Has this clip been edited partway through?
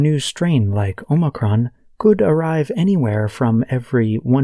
no; 0 cuts

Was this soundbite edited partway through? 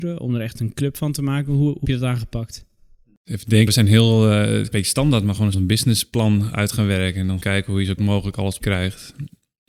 yes; 7 cuts; at 1.8 s, 3.7 s, 4.7 s, 5.5 s, 7.4 s, 8.0 s, 8.6 s

